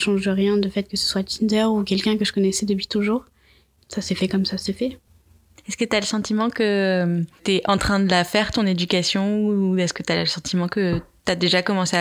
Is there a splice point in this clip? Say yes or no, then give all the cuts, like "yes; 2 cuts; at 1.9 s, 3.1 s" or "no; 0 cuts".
no; 0 cuts